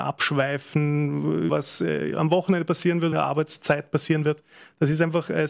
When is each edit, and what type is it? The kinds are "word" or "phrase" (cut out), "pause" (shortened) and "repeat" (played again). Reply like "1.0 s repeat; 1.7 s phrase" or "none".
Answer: 1.5 s word; 3.1 s phrase